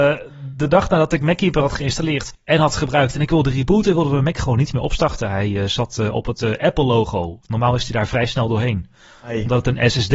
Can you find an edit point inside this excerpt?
no; 0 cuts

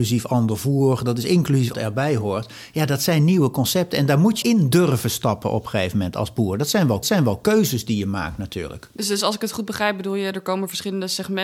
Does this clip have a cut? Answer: yes; 3 cuts; at 1.7 s, 4.4 s, 7.0 s

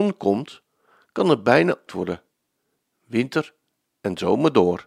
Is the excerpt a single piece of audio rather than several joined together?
no; 1 cut; at 1.9 s

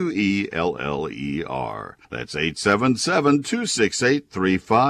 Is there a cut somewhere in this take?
yes; 1 cut; at 2.0 s

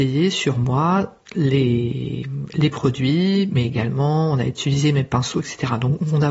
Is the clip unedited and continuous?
yes; 0 cuts

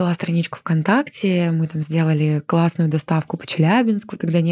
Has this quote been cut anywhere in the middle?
no; 0 cuts

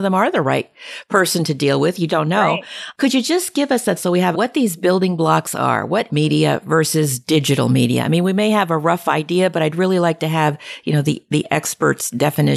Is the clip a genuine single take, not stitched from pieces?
no; 4 cuts; at 2.1 s, 4.0 s, 4.3 s, 6.1 s

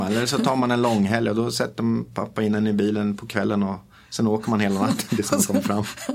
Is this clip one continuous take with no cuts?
yes; 0 cuts

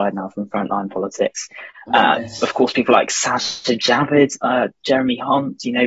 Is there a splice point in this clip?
no; 0 cuts

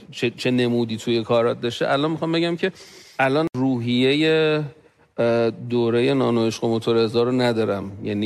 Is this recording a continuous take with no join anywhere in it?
yes; 0 cuts

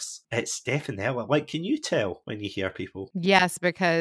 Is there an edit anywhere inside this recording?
no; 0 cuts

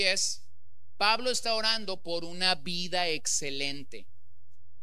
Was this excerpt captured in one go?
yes; 0 cuts

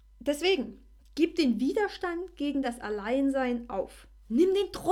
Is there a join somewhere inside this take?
no; 0 cuts

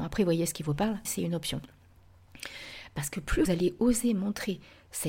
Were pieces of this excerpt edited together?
yes; 2 cuts; at 1.0 s, 3.4 s

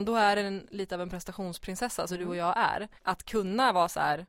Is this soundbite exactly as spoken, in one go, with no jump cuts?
no; 2 cuts; at 2.1 s, 3.0 s

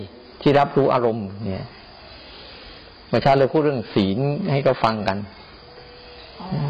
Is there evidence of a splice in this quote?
no; 0 cuts

